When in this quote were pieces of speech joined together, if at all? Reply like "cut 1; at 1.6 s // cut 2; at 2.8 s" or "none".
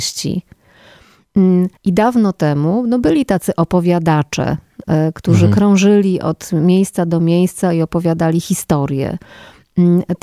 cut 1; at 1.8 s